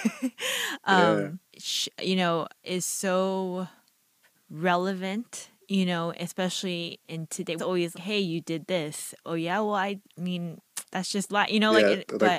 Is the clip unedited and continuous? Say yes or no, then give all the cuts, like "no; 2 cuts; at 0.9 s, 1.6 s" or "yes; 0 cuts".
no; 8 cuts; at 1.5 s, 2.6 s, 4.2 s, 7.0 s, 7.6 s, 7.9 s, 10.1 s, 10.9 s